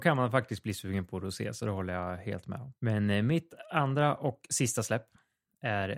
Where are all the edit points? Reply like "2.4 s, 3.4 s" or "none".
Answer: 2.8 s

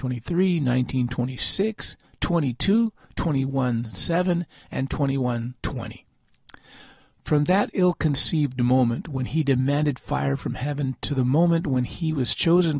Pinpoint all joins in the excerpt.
5.6 s

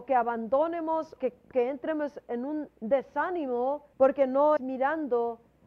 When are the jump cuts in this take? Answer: 1.2 s, 1.5 s, 3.9 s, 4.6 s

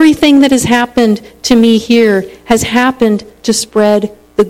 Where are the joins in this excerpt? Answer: none

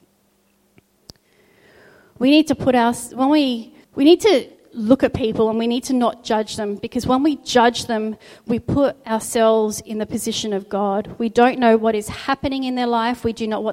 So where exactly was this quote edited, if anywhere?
3.8 s

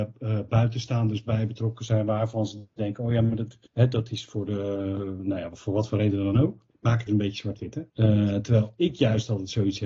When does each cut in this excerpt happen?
3.7 s, 6.7 s, 7.1 s, 7.9 s

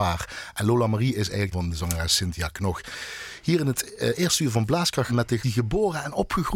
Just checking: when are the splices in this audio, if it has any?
1.5 s, 5.1 s, 5.4 s

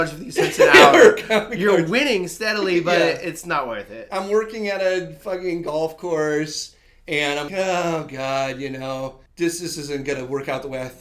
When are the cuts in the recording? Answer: 7.5 s, 9.3 s

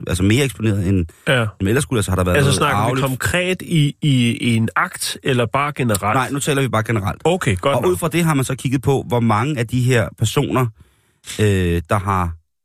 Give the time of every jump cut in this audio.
none

